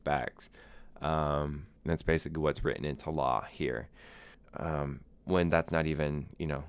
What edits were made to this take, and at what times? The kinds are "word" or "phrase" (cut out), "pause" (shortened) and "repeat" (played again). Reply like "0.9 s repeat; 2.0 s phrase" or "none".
1.8 s pause; 4.3 s pause